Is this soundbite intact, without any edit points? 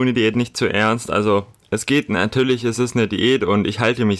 yes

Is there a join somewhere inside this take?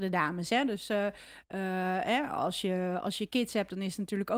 no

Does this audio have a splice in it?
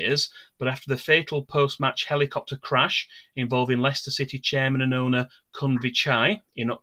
no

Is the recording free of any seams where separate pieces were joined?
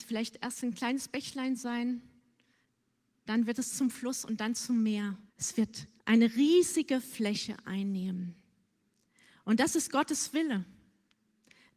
no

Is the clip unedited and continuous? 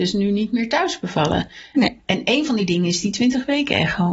yes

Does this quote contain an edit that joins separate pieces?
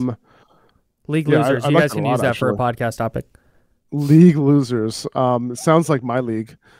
no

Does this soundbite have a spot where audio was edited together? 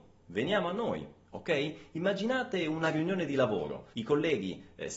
yes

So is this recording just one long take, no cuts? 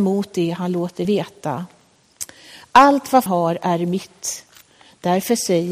no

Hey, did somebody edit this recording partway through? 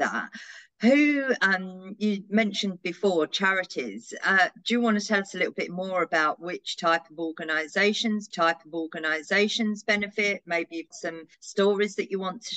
yes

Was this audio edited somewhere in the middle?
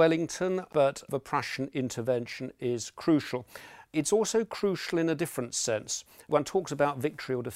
yes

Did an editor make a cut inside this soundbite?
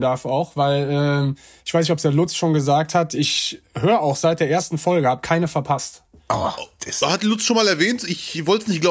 no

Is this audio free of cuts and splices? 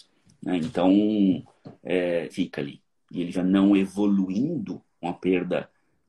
no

